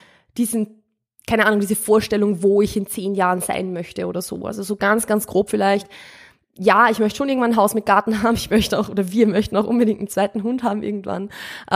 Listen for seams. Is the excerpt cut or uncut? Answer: uncut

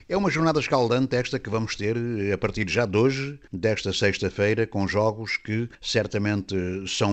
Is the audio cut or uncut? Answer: cut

